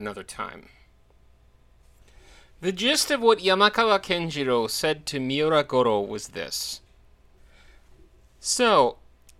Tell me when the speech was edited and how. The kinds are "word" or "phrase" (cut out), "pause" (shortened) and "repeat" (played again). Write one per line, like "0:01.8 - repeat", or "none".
none